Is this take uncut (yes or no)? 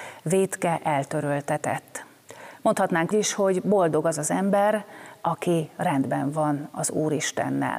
no